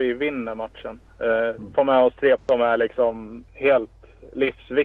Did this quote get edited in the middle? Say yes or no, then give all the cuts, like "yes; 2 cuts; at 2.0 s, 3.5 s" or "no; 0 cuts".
yes; 2 cuts; at 2.4 s, 3.5 s